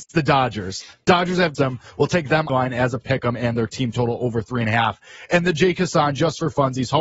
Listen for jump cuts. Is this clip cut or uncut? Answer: cut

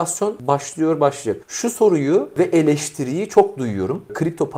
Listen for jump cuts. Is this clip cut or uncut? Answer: uncut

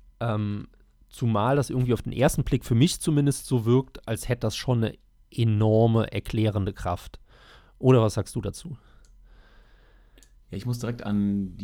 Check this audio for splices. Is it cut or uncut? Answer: uncut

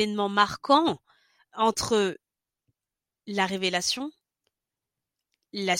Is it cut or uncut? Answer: uncut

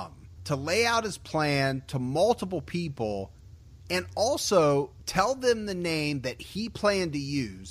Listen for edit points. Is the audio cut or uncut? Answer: uncut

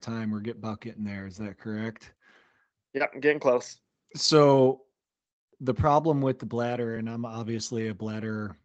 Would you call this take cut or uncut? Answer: uncut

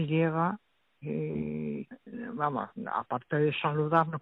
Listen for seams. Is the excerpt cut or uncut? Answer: uncut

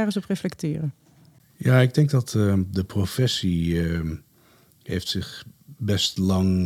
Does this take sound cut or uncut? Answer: uncut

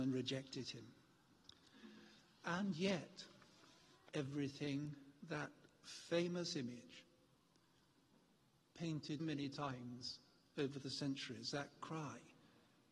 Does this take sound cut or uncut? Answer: cut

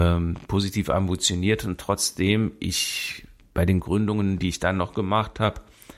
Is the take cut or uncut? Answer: uncut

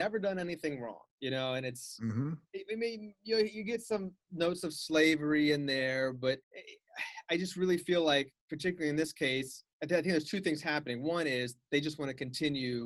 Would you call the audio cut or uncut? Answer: cut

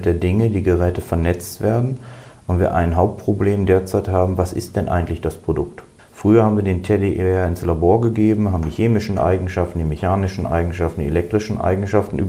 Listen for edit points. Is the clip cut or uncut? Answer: cut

